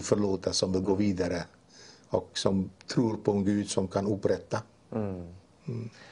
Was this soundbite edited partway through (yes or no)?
no